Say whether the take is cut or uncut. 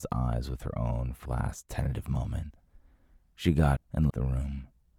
cut